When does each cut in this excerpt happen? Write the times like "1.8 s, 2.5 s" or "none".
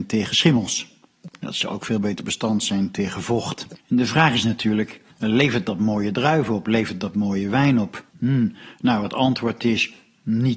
3.8 s, 5.1 s, 8.1 s